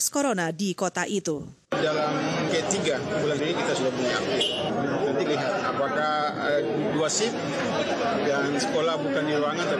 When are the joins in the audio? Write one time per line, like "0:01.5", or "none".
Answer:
0:02.5
0:03.4
0:05.3